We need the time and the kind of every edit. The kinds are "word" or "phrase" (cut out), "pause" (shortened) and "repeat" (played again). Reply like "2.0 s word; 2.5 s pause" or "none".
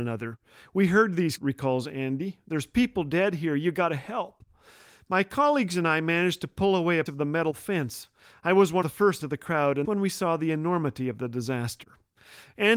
1.4 s word; 7.1 s word; 8.8 s word; 9.2 s word; 9.8 s word